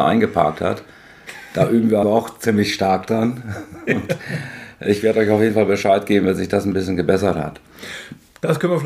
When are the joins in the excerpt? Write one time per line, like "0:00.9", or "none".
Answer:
0:02.0